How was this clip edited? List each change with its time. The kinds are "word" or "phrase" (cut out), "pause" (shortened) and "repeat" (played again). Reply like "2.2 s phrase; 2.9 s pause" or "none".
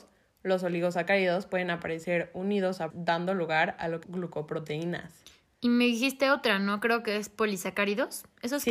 2.9 s word; 4.0 s phrase